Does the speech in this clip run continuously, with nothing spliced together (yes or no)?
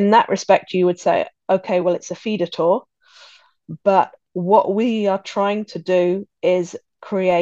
yes